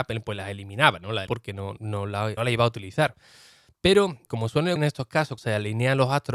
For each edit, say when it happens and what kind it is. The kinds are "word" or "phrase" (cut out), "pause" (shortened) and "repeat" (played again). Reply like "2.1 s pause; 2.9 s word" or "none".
1.3 s word; 1.8 s word; 2.4 s word; 4.3 s word; 4.8 s word; 5.4 s word